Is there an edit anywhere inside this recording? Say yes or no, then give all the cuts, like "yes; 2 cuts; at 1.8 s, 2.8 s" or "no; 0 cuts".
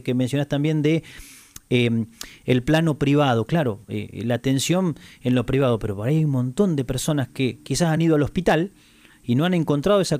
no; 0 cuts